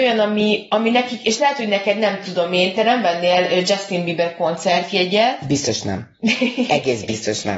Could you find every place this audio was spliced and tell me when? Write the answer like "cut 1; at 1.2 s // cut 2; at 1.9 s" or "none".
none